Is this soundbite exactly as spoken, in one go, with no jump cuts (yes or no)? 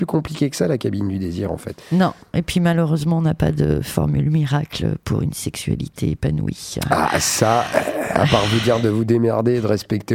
no